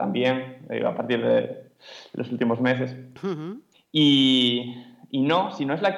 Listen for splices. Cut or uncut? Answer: cut